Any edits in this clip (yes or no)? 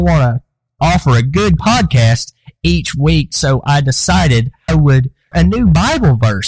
yes